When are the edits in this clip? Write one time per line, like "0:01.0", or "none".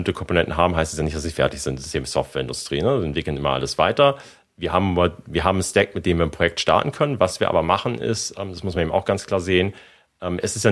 none